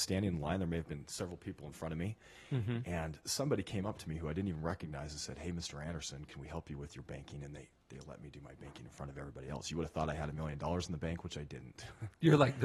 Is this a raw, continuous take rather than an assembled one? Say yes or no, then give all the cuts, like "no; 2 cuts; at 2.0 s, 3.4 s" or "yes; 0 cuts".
yes; 0 cuts